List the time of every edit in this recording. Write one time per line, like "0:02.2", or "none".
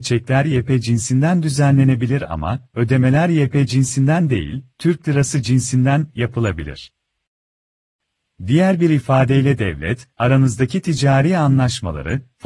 none